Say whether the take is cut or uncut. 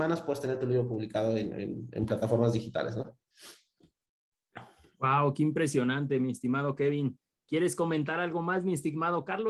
uncut